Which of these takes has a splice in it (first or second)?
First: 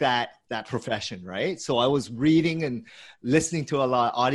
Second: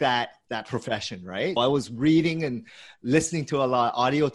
second